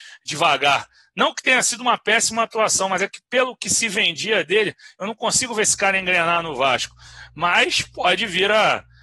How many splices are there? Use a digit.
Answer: 0